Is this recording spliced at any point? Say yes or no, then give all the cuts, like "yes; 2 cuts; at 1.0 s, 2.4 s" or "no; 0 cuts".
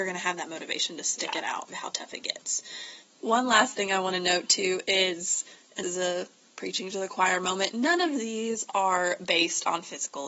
yes; 2 cuts; at 1.7 s, 5.8 s